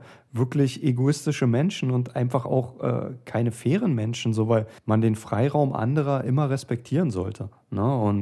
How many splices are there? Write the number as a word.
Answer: one